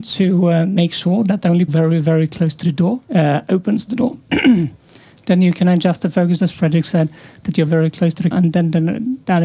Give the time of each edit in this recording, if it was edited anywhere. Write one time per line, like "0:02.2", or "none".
0:01.7
0:03.0
0:06.4
0:07.7
0:08.3